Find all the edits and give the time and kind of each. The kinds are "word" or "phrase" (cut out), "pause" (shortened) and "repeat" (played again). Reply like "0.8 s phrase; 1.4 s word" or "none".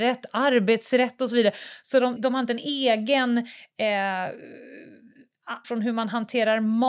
2.2 s word; 5.6 s word